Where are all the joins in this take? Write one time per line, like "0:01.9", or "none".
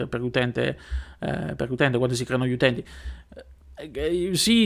none